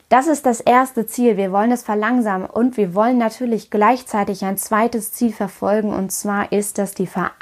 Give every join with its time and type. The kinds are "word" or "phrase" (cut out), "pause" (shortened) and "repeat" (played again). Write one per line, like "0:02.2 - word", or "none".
none